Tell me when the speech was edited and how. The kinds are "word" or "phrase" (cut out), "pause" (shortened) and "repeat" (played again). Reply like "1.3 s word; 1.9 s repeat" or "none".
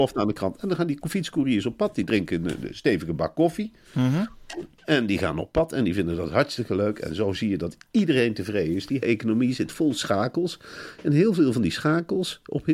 9.0 s word